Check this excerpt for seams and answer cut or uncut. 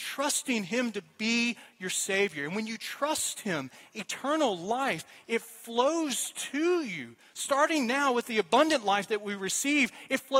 uncut